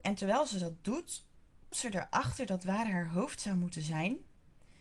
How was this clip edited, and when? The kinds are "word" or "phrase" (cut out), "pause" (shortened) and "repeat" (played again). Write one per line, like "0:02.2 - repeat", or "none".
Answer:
0:01.7 - word